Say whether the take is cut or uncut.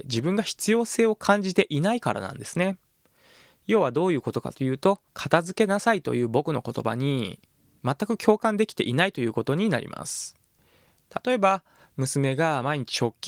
cut